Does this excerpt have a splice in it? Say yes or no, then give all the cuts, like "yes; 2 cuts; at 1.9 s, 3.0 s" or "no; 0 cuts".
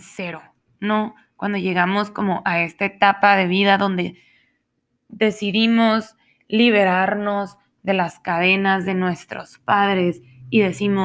no; 0 cuts